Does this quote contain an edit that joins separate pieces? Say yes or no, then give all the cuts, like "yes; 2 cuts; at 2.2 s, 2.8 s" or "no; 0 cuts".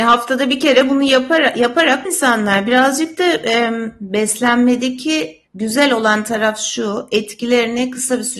yes; 2 cuts; at 2.1 s, 5.5 s